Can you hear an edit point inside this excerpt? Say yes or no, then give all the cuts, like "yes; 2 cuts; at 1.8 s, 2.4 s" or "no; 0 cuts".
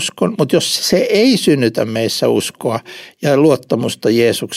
no; 0 cuts